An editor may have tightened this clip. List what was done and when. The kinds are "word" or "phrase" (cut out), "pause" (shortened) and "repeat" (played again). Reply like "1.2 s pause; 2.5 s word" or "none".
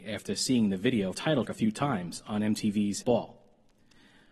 1.1 s phrase; 1.4 s word; 3.0 s word